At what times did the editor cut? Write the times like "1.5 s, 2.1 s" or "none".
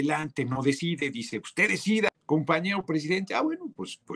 2.1 s